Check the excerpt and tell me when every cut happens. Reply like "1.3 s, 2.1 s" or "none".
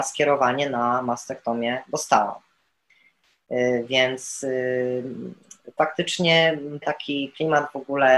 5.8 s, 6.8 s